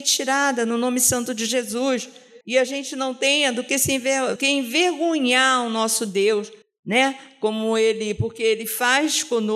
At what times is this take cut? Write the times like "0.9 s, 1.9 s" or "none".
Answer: 2.4 s, 4.4 s, 6.6 s